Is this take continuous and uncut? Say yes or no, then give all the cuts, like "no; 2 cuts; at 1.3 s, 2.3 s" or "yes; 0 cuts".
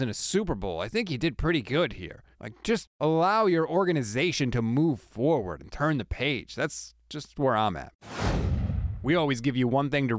no; 1 cut; at 2.3 s